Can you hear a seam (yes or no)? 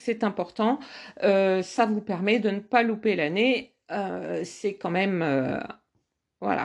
no